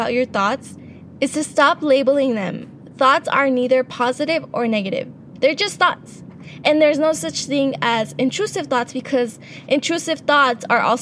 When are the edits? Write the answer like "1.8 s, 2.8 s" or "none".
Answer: none